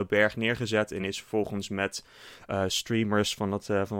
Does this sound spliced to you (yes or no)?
no